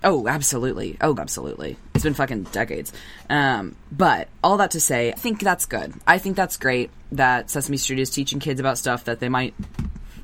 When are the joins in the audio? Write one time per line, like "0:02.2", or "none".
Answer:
0:01.2
0:05.2